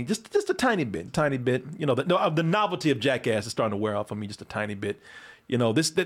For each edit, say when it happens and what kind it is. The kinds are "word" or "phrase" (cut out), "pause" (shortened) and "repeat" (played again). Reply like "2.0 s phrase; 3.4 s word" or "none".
1.1 s word

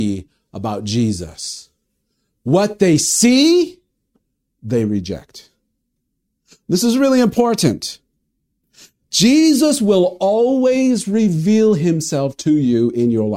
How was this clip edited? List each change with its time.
none

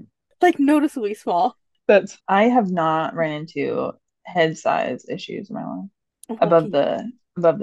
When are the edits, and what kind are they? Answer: 2.2 s word; 6.4 s word

